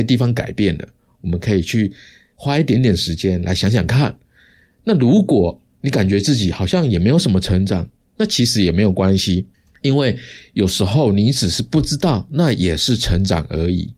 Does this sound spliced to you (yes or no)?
no